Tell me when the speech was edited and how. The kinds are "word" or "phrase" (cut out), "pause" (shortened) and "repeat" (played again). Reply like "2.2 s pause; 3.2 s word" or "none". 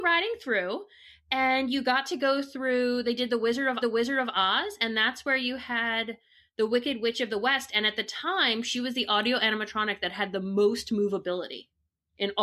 3.8 s repeat